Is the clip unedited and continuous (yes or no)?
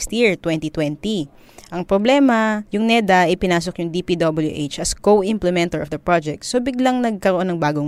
yes